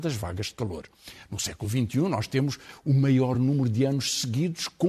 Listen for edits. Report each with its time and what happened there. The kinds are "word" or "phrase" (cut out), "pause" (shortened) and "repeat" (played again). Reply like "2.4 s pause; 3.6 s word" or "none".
none